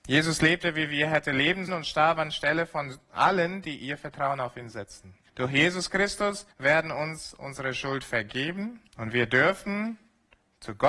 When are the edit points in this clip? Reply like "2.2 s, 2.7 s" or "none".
1.7 s, 5.3 s, 6.5 s, 8.9 s